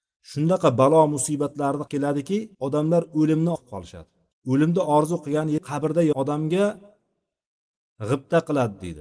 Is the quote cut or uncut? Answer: cut